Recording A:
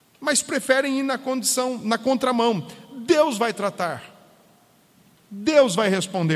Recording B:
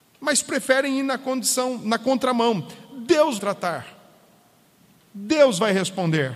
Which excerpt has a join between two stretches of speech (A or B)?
B